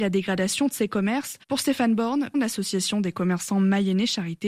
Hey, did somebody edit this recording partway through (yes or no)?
yes